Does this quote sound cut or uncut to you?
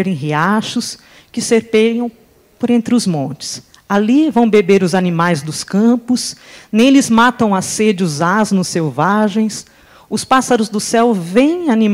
uncut